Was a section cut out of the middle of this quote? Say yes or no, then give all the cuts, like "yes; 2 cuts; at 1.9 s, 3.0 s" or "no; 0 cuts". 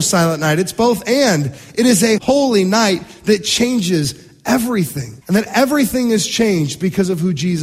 yes; 2 cuts; at 2.2 s, 5.2 s